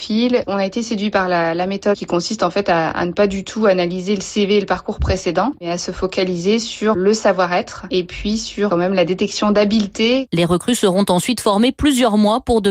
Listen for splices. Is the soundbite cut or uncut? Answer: uncut